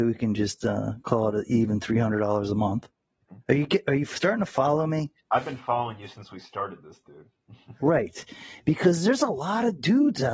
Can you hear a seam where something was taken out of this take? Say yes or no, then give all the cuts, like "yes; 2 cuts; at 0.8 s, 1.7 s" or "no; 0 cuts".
yes; 2 cuts; at 3.4 s, 5.2 s